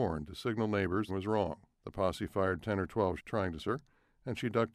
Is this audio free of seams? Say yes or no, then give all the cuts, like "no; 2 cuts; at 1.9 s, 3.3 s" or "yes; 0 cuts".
no; 4 cuts; at 1.1 s, 1.7 s, 3.2 s, 3.6 s